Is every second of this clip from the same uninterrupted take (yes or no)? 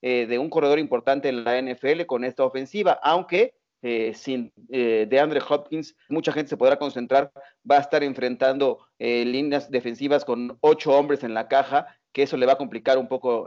no